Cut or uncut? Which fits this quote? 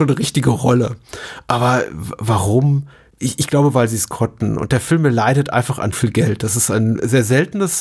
cut